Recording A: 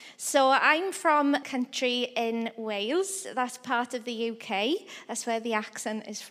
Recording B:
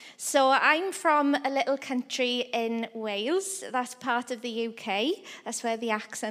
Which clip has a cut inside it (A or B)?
A